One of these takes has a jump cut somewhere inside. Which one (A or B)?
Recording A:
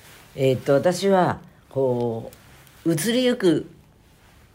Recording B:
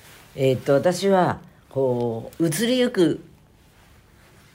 B